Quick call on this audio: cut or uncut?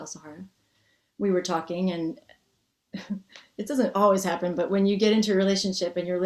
uncut